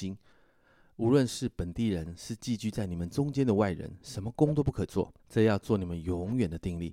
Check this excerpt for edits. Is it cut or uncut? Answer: cut